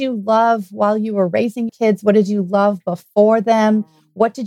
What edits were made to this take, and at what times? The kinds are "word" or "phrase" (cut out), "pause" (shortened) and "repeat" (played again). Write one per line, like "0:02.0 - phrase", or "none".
0:01.7 - word